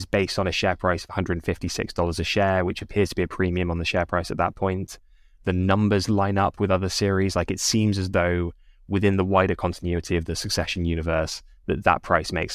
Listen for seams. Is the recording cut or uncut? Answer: uncut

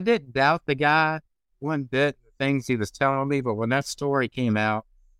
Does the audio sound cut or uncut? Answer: uncut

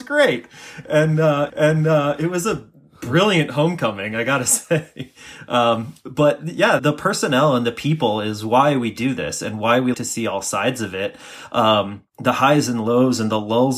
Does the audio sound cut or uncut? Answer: cut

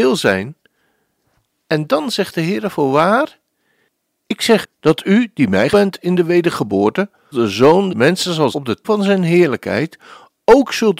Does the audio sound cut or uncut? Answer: cut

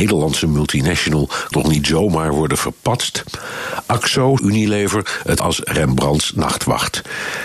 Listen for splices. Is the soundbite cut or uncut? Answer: cut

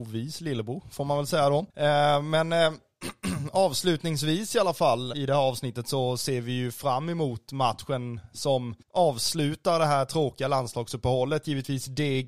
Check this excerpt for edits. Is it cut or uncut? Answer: cut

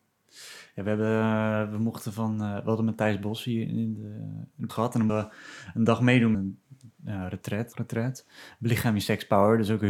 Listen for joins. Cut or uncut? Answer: cut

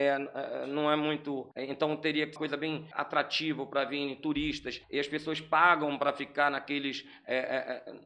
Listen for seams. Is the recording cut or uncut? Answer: cut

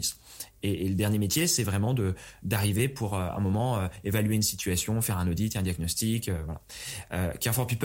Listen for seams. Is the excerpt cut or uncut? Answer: uncut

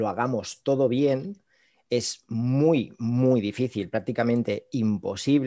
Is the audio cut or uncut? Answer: uncut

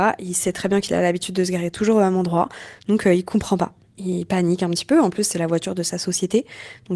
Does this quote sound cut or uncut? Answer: uncut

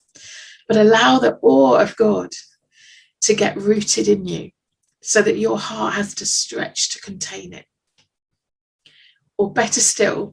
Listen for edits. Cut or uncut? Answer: uncut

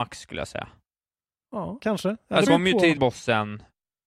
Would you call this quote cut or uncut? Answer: cut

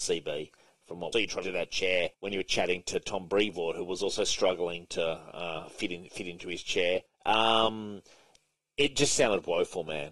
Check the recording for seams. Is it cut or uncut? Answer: cut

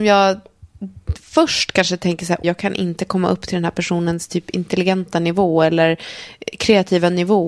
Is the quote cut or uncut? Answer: cut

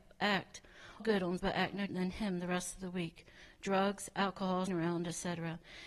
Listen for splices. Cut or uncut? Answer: cut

